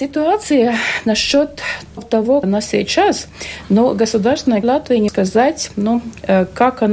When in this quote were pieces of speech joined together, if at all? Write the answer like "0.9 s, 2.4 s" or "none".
2.0 s, 2.4 s, 4.6 s, 5.1 s

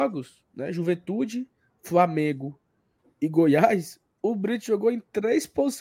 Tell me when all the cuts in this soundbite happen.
none

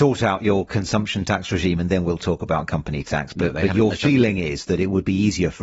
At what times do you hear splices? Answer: none

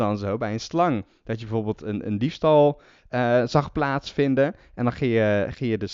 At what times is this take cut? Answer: none

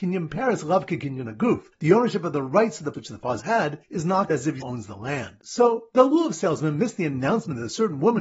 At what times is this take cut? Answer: 1.7 s, 2.9 s, 3.4 s, 3.8 s, 4.3 s, 4.6 s

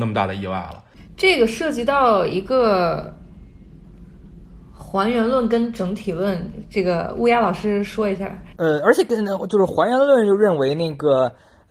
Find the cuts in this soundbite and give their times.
8.5 s

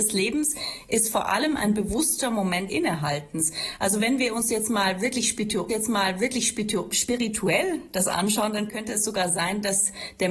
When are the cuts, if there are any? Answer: 2.7 s, 5.7 s

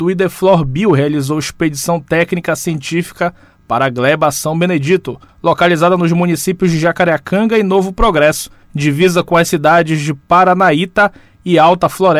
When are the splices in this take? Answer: none

